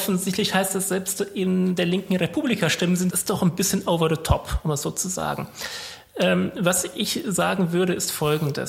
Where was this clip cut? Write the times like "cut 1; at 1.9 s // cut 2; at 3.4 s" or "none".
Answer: cut 1; at 3.1 s